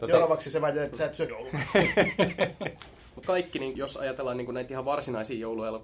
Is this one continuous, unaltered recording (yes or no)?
no